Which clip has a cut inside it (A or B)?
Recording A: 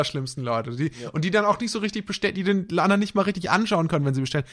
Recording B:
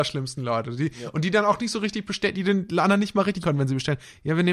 B